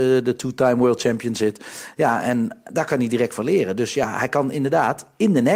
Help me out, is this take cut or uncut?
uncut